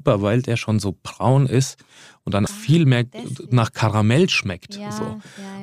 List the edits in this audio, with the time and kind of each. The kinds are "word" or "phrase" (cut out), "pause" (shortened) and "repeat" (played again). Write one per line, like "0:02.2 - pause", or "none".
0:02.5 - word